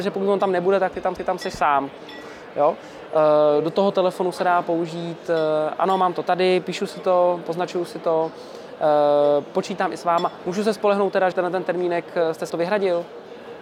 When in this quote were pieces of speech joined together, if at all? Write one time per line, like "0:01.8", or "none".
0:01.2
0:11.3
0:12.5

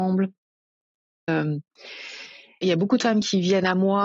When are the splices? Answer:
0:01.3

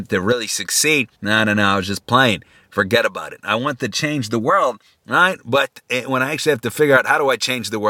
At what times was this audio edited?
0:01.1

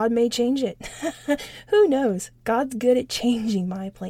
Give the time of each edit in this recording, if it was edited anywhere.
none

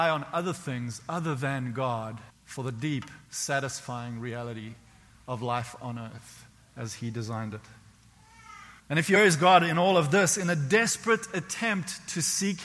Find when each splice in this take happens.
0:02.3
0:03.3
0:08.8
0:09.2

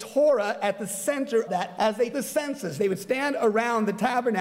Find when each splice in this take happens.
0:01.5
0:01.8
0:02.1

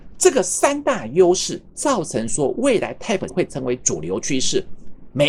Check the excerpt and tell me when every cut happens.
0:03.3

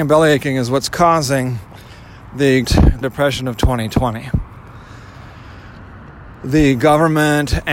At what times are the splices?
0:02.6
0:03.0

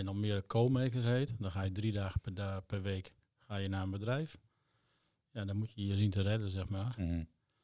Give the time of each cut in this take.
none

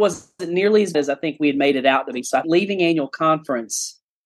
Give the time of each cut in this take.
0:00.9
0:02.4

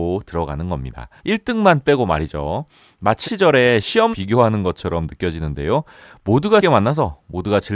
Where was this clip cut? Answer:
0:01.2
0:03.2
0:04.1
0:06.6

